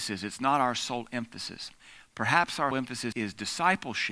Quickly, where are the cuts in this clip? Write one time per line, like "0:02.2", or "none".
0:02.7
0:03.1